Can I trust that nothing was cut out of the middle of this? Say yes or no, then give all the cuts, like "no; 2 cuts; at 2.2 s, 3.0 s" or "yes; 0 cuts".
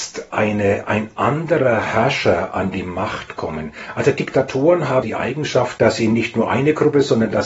no; 1 cut; at 5.0 s